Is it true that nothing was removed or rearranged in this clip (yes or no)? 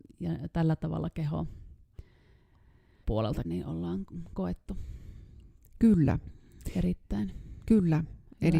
no